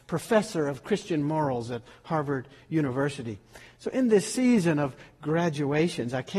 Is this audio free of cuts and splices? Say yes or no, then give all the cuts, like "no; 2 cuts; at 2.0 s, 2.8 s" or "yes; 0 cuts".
yes; 0 cuts